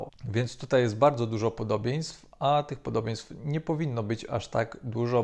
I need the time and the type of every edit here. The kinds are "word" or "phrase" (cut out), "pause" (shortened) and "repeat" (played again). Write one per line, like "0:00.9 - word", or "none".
none

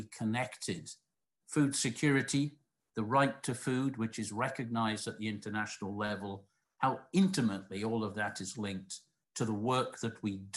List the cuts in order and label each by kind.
0:01.4 - word

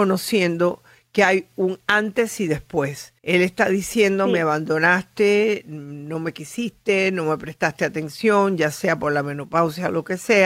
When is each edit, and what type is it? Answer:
0:03.2 - pause

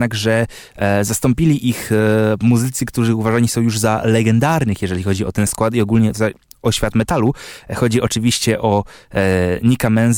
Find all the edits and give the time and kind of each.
none

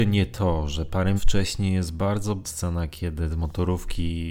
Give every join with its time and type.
0:01.2 - word
0:02.4 - word

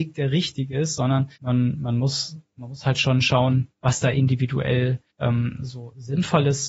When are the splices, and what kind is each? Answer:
0:01.3 - pause
0:03.7 - pause
0:05.1 - pause

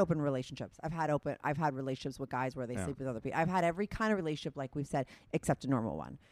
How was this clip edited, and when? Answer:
none

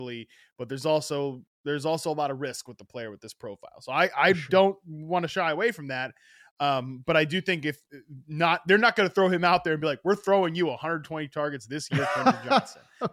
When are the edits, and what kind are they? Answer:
none

